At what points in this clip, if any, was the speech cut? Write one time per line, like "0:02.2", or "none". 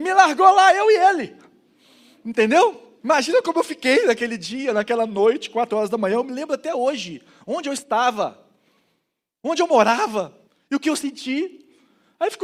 0:03.0
0:10.5